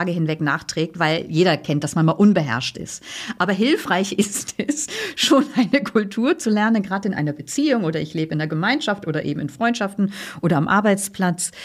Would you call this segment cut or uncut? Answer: uncut